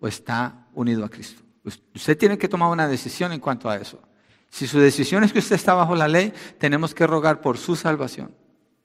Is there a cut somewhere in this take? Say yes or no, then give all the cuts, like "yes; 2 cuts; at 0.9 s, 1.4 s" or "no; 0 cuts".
no; 0 cuts